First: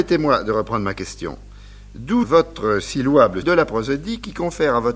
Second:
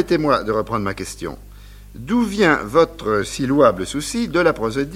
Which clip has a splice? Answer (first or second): first